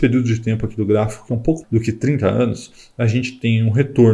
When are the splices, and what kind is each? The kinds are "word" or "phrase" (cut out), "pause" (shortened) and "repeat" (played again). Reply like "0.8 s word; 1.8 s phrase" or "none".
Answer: 1.6 s word